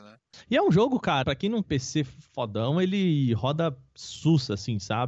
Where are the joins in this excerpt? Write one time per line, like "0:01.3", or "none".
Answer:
0:01.2
0:01.6